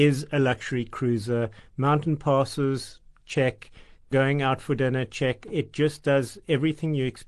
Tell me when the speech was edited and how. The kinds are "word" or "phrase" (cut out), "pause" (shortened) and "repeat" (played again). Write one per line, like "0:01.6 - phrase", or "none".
none